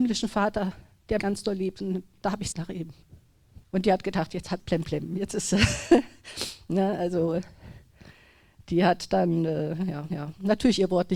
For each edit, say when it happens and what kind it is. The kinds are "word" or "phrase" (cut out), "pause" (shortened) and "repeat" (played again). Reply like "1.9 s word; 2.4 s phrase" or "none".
1.2 s word; 2.5 s word; 3.6 s pause; 4.6 s word; 10.1 s repeat